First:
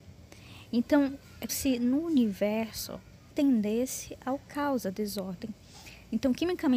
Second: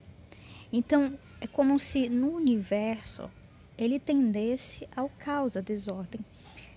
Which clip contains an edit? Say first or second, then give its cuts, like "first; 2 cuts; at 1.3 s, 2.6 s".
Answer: first; 2 cuts; at 1.5 s, 3.3 s